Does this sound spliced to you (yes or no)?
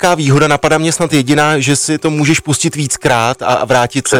no